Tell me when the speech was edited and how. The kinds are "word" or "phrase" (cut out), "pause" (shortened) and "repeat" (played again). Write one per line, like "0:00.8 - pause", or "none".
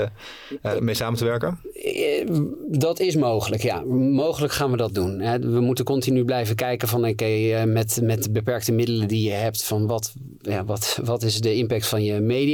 none